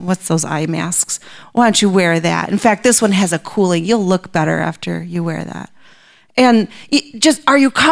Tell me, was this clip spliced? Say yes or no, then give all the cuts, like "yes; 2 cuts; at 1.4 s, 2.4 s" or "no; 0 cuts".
no; 0 cuts